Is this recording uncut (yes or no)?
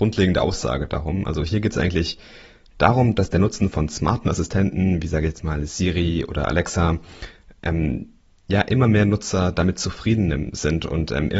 yes